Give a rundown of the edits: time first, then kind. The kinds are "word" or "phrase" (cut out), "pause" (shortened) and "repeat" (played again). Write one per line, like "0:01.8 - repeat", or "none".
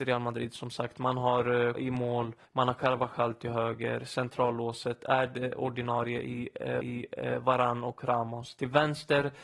0:01.7 - word
0:02.4 - pause
0:06.8 - repeat